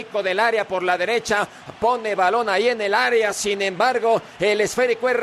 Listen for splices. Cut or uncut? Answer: uncut